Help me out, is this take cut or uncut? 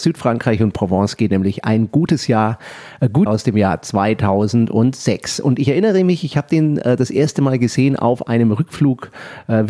cut